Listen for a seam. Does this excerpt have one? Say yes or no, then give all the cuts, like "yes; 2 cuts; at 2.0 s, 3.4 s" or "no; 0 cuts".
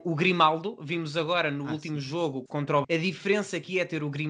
yes; 2 cuts; at 2.5 s, 2.8 s